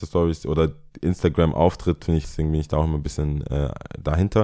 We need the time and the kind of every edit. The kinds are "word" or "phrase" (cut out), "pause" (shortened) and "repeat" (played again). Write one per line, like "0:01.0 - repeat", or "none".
0:02.2 - phrase

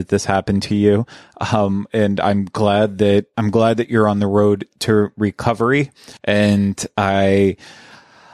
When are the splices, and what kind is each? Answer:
0:06.2 - pause

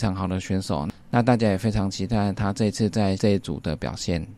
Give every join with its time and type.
0:03.2 - word

